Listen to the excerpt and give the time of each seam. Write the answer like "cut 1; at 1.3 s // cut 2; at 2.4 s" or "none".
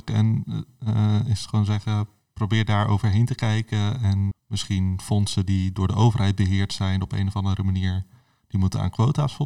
cut 1; at 4.3 s